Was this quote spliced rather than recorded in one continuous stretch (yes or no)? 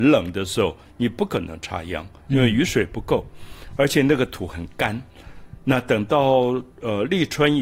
yes